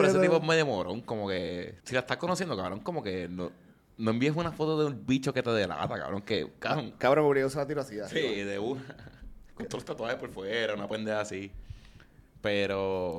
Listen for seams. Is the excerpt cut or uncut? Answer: cut